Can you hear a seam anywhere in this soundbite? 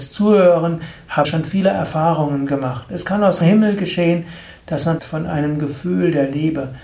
yes; 3 cuts; at 1.2 s, 3.4 s, 5.0 s

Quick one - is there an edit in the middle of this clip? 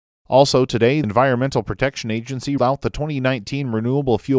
yes; 2 cuts; at 1.0 s, 2.6 s

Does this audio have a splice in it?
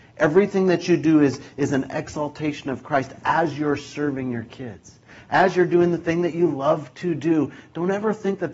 no; 0 cuts

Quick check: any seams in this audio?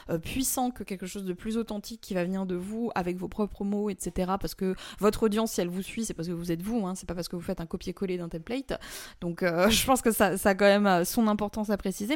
no; 0 cuts

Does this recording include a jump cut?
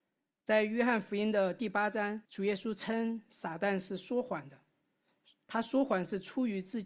yes; 1 cut; at 2.2 s

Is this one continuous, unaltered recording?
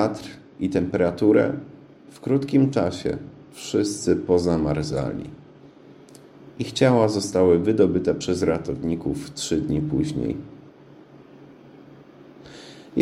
yes; 0 cuts

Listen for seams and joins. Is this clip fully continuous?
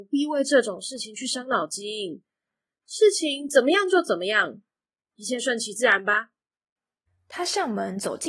yes; 0 cuts

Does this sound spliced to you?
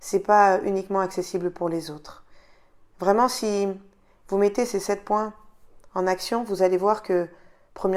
no; 0 cuts

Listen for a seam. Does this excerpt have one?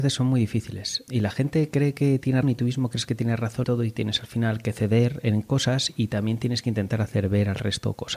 yes; 3 cuts; at 1.1 s, 2.4 s, 3.6 s

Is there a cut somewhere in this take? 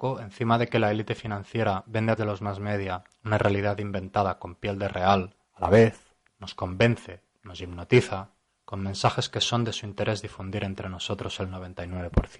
yes; 4 cuts; at 2.2 s, 5.4 s, 6.3 s, 8.5 s

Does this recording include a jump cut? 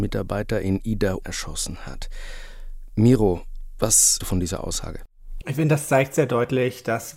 yes; 2 cuts; at 1.2 s, 4.2 s

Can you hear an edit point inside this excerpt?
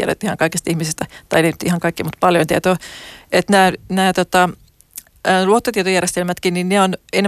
no; 0 cuts

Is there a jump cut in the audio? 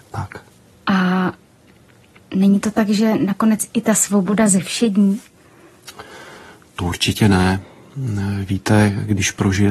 no; 0 cuts

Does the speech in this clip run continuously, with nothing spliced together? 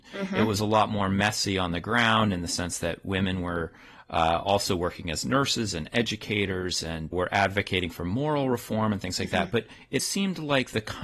no; 2 cuts; at 7.1 s, 10.0 s

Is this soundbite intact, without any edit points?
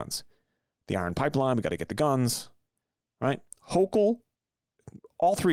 yes; 0 cuts

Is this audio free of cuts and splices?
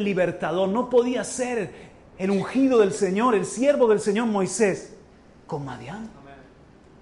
yes; 0 cuts

